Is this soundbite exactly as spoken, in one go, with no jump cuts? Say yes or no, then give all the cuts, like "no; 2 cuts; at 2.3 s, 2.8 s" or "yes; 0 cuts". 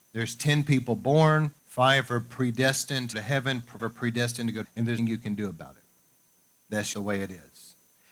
no; 6 cuts; at 1.6 s, 3.1 s, 3.8 s, 4.6 s, 5.0 s, 6.9 s